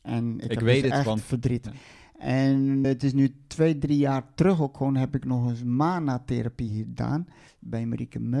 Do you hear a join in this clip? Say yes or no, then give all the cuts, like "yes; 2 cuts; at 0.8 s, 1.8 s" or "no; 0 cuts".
yes; 2 cuts; at 2.8 s, 7.5 s